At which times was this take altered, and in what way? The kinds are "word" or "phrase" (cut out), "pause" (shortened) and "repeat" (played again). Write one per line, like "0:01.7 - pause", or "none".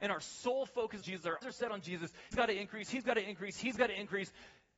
0:01.0 - word
0:01.4 - word
0:02.3 - word

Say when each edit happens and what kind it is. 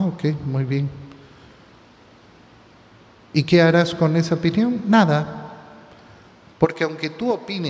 none

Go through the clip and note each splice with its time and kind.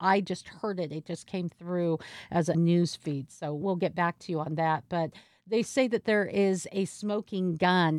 none

